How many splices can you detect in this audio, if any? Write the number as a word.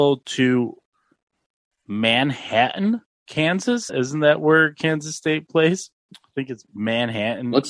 two